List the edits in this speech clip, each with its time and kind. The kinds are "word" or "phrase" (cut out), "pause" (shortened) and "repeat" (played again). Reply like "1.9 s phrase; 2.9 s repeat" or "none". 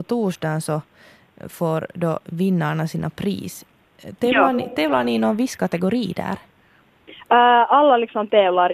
none

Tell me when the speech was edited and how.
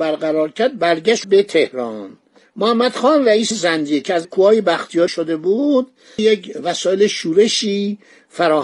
1.2 s word; 2.4 s pause; 3.5 s word; 4.2 s phrase; 5.1 s word; 6.2 s phrase

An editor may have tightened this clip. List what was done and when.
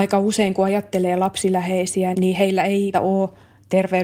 2.1 s word; 2.9 s word

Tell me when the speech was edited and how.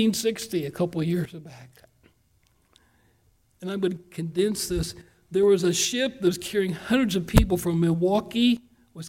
none

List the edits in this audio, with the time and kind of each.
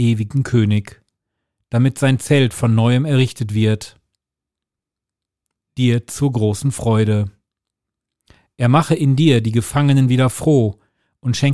none

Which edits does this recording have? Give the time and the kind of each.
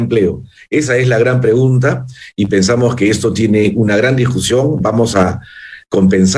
none

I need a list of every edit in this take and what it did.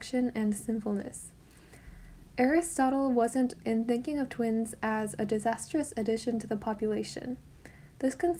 3.6 s phrase

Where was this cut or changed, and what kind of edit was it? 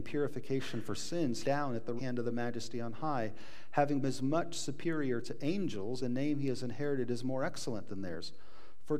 1.4 s phrase; 2.0 s word; 4.0 s word; 6.0 s word

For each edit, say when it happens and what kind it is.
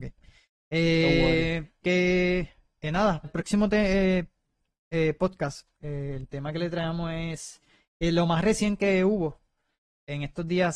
1.8 s word; 3.2 s word; 5.8 s pause

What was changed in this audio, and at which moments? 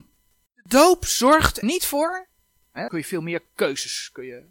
1.6 s word; 2.9 s word

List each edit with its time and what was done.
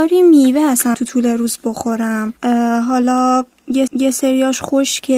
0.9 s word; 3.9 s repeat

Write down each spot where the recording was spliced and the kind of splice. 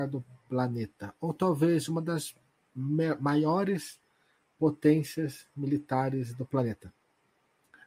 none

